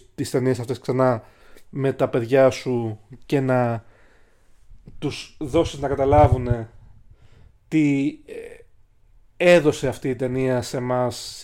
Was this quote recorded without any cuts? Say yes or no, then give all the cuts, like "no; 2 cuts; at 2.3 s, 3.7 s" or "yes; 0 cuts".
yes; 0 cuts